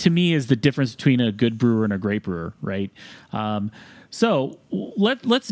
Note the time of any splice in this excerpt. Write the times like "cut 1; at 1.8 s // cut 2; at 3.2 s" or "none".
none